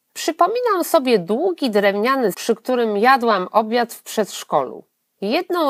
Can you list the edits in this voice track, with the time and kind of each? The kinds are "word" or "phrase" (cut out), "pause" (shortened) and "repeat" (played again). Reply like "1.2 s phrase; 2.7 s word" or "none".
2.3 s word